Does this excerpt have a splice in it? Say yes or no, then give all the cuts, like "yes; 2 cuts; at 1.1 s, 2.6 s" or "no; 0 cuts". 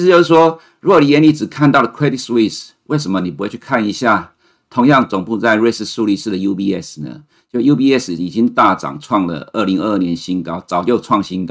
no; 0 cuts